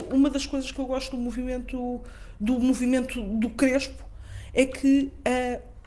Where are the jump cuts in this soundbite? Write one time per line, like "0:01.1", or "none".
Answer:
none